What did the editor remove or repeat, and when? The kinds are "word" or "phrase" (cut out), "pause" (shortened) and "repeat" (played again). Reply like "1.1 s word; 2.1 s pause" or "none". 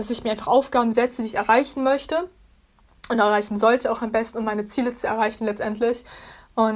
none